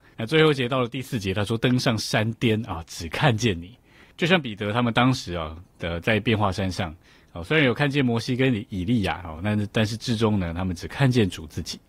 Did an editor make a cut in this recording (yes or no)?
no